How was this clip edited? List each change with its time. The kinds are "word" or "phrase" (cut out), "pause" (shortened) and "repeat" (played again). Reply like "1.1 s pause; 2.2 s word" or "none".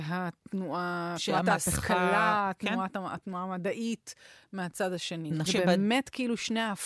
5.5 s word